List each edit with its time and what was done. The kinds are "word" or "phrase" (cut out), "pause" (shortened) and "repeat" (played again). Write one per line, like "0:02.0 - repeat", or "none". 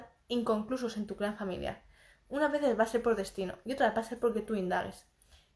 none